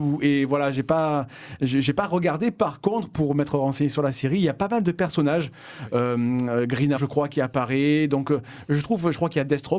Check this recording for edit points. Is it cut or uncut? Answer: cut